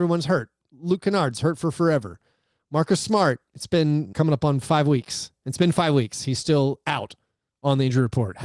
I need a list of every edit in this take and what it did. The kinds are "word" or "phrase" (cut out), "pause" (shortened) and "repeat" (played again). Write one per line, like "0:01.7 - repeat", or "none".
0:04.1 - word